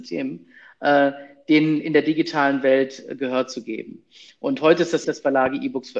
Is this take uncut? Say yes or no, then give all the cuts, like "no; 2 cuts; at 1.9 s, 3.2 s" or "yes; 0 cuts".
no; 1 cut; at 5.0 s